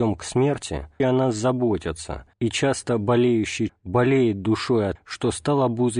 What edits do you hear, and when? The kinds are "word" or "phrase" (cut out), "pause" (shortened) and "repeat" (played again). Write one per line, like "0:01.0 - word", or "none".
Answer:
0:01.0 - word
0:02.3 - pause
0:03.7 - word
0:05.0 - word